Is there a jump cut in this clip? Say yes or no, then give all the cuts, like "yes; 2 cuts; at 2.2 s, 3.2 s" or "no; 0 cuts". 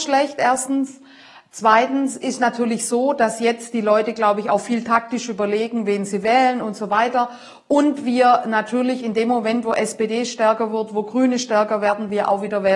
no; 0 cuts